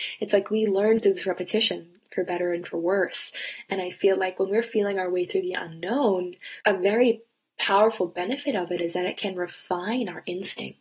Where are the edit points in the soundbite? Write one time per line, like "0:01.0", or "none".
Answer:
0:06.6